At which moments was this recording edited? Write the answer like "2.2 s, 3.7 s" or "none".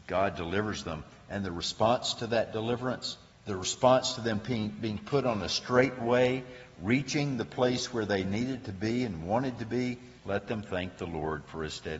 3.3 s, 10.2 s